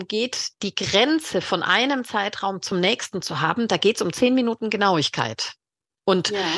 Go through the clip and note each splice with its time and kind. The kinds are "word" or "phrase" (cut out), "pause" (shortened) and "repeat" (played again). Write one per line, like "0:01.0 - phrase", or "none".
none